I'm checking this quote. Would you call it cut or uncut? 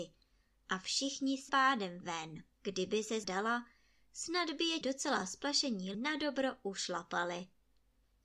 cut